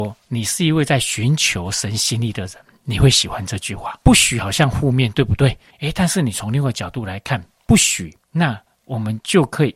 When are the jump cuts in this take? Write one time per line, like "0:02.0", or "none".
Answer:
0:04.0
0:05.7
0:08.2